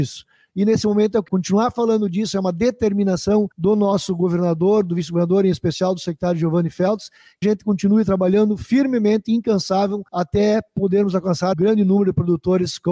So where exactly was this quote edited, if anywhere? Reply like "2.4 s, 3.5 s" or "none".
1.3 s, 3.5 s, 7.4 s, 10.1 s, 11.5 s

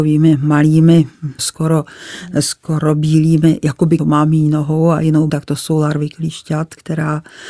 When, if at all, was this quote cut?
1.4 s, 4.0 s, 5.3 s

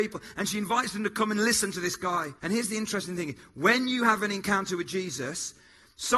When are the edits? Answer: 2.4 s

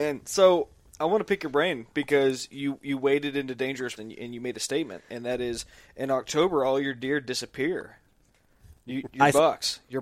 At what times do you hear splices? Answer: 2.5 s, 4.0 s

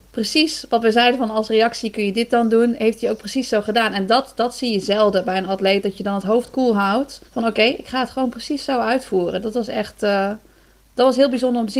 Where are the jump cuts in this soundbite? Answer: 7.3 s

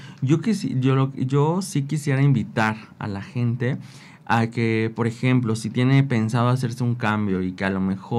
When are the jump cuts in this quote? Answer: none

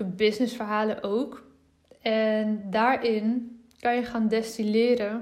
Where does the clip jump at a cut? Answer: none

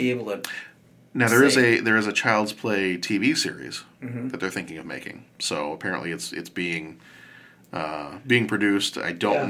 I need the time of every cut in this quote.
5.3 s

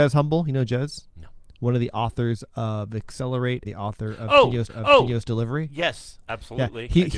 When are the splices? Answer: 1.1 s, 3.6 s, 4.7 s

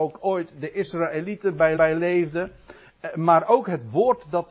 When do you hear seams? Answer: 1.8 s

